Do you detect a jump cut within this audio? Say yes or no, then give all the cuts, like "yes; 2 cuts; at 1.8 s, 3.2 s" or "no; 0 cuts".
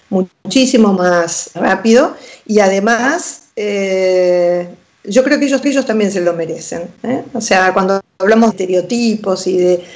yes; 4 cuts; at 1.5 s, 3.5 s, 5.6 s, 8.5 s